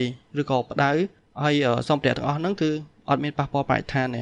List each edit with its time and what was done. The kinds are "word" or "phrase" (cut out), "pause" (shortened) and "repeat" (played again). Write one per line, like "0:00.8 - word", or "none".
none